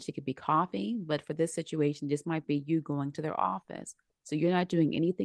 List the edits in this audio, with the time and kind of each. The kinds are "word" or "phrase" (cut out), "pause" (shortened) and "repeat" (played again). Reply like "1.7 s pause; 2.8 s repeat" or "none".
none